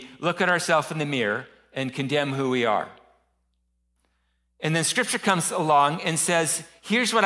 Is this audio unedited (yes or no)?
yes